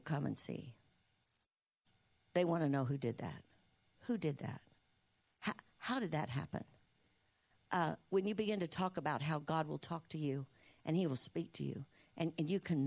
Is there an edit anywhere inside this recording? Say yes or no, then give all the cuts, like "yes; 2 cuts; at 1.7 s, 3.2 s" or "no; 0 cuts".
no; 0 cuts